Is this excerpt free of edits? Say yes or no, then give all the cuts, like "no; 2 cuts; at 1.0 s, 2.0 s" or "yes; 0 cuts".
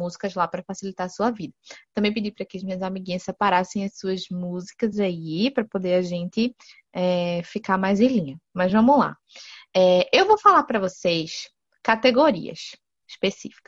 yes; 0 cuts